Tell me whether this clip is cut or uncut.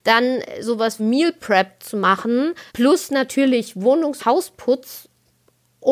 cut